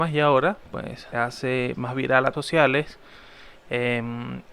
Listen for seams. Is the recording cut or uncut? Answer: cut